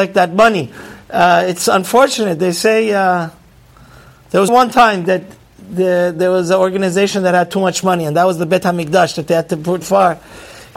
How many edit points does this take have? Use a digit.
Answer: 2